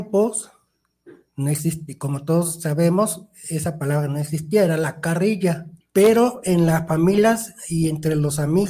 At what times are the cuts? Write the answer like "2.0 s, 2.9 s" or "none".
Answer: 5.8 s